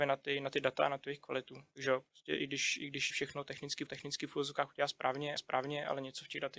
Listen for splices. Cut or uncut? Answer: cut